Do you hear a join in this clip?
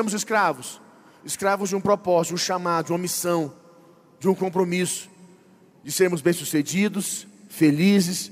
no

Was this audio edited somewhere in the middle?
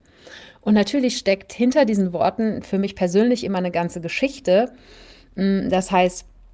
no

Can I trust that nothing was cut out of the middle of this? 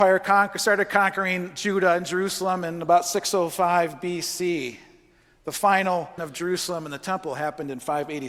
no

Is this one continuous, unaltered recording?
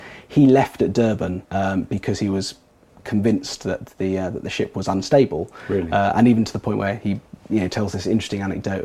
no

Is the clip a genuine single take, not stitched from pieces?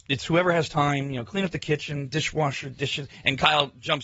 yes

